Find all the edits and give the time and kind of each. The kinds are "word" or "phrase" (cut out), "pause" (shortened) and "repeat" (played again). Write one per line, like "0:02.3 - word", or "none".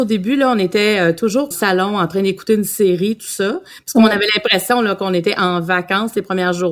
0:01.5 - phrase